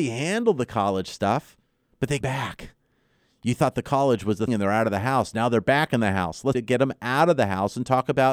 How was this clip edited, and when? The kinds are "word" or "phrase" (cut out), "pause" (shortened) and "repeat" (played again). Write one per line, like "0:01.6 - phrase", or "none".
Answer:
0:02.2 - word
0:04.5 - word
0:06.5 - word